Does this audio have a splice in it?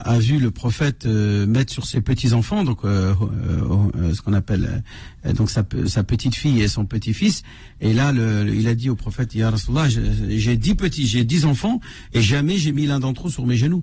yes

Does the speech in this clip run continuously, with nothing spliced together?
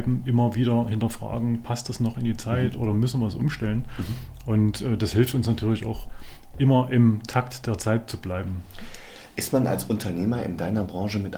yes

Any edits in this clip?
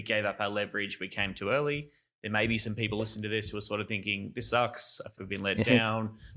yes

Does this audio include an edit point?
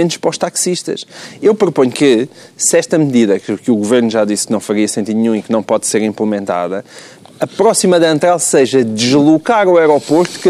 no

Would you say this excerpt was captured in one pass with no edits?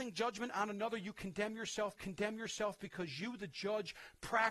no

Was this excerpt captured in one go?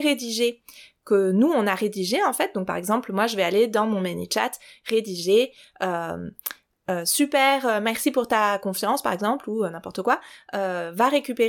yes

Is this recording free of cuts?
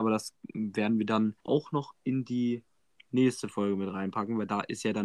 no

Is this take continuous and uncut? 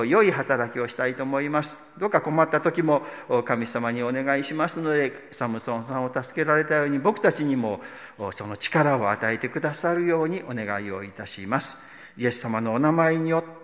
yes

